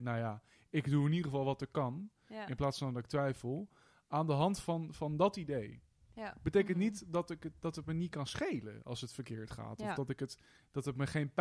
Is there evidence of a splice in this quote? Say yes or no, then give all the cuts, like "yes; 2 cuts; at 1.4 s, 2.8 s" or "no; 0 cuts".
no; 0 cuts